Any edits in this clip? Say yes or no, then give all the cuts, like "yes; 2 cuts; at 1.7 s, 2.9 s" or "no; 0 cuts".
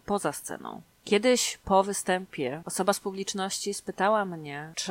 no; 0 cuts